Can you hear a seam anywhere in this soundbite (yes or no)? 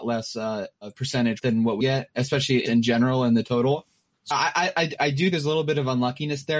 yes